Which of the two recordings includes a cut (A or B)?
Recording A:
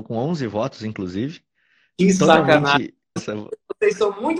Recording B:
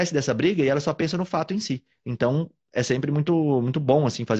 A